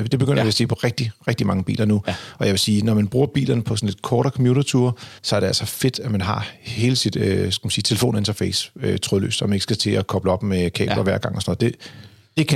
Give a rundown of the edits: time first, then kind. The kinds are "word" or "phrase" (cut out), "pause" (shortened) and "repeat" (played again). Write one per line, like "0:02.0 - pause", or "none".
0:05.2 - pause